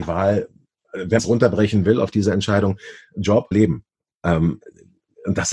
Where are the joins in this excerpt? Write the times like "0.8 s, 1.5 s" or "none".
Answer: 1.2 s, 3.5 s